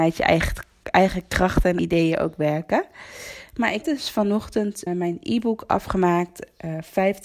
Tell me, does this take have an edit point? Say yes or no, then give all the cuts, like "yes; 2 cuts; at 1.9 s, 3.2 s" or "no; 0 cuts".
yes; 3 cuts; at 1.8 s, 3.8 s, 4.9 s